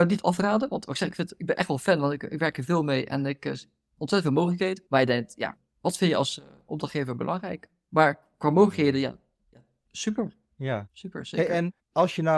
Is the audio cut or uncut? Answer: uncut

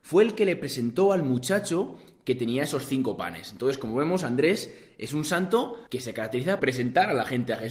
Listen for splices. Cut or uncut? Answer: cut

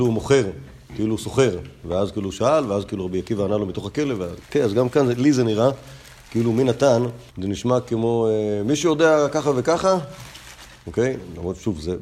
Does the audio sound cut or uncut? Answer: cut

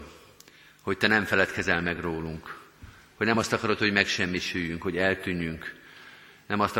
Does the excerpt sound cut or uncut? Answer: uncut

